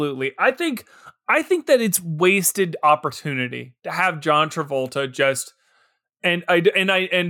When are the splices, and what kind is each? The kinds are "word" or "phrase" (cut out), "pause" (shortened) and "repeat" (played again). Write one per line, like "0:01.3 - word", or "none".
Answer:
none